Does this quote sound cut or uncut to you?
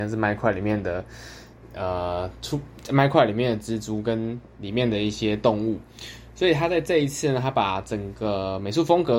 uncut